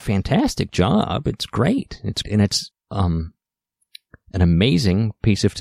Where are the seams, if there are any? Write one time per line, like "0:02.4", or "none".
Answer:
0:02.2
0:02.7